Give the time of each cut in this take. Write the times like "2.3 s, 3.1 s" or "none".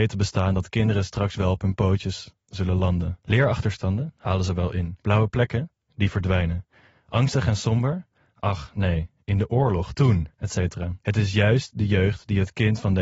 none